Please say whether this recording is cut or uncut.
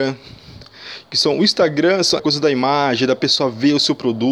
cut